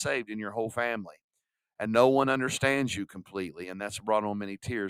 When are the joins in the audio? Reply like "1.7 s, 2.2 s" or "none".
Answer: none